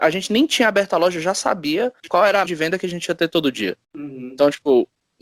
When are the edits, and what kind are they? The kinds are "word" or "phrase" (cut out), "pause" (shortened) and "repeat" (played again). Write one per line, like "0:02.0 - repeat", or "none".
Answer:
0:02.0 - pause
0:02.5 - word
0:03.8 - pause